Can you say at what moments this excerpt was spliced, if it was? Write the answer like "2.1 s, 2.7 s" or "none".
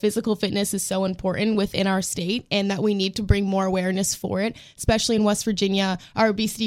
none